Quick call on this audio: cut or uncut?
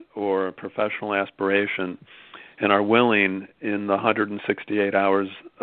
uncut